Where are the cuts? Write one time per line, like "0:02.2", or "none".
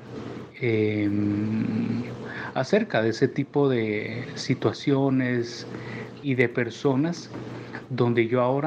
0:06.2